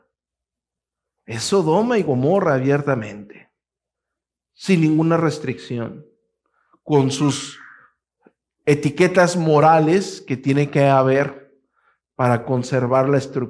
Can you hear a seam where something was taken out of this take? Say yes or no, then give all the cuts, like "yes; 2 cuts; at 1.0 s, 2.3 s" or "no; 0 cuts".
no; 0 cuts